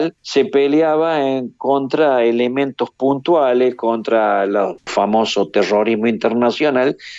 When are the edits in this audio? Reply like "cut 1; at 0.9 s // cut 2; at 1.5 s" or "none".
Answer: cut 1; at 4.8 s

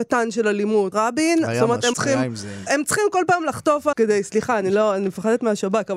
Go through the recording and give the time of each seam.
cut 1; at 0.9 s // cut 2; at 1.9 s // cut 3; at 2.7 s // cut 4; at 3.9 s

